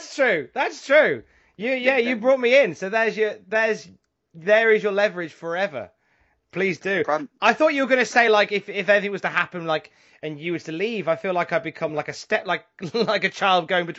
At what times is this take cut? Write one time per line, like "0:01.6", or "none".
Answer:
none